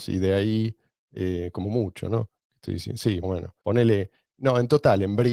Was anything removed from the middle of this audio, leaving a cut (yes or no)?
yes